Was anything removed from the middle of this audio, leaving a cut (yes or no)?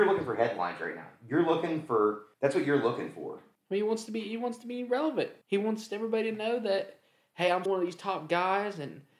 yes